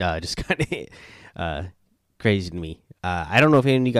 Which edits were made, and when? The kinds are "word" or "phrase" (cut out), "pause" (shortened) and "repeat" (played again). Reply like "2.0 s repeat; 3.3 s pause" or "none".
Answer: 1.9 s pause; 3.0 s pause